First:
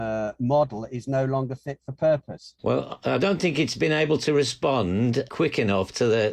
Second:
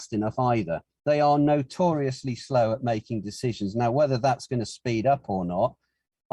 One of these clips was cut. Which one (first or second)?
first